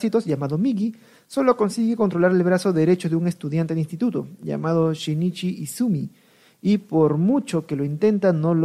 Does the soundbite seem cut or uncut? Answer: uncut